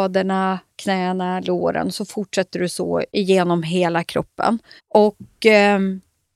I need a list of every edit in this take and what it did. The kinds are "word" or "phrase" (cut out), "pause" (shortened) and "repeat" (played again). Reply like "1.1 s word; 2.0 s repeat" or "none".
3.1 s pause; 4.8 s pause